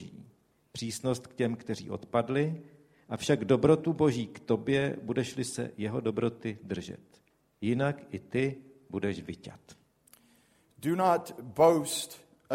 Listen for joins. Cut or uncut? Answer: uncut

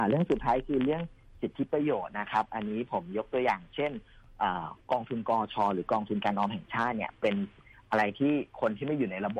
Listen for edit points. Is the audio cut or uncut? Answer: cut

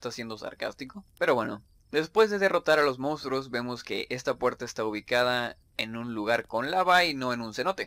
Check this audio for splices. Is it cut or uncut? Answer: cut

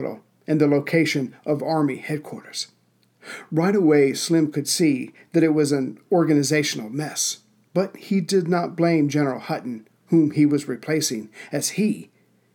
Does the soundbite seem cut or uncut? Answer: uncut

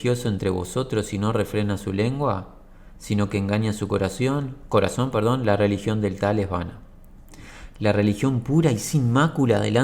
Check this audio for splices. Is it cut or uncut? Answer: uncut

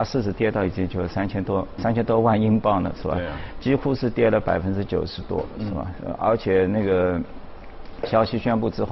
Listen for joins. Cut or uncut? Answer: cut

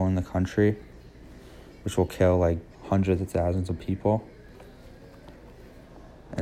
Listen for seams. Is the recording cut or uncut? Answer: cut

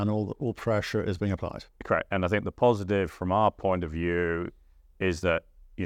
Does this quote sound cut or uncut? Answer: uncut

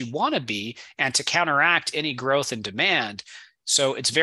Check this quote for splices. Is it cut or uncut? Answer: uncut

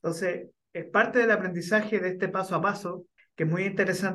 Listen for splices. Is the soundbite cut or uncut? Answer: cut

